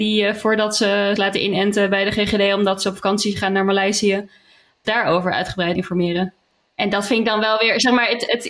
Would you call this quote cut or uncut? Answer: cut